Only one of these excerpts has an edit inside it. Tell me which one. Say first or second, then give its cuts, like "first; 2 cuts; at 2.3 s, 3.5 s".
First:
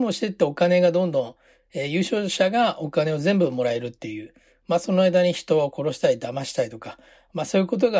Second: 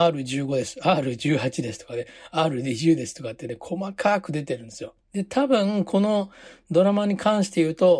second; 1 cut; at 5.0 s